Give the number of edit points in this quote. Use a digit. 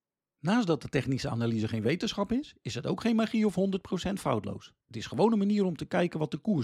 1